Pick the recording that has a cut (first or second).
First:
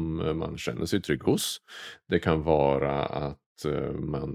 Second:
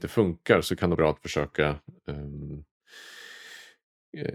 second